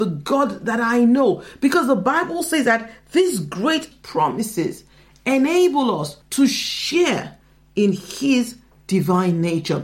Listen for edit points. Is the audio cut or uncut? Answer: cut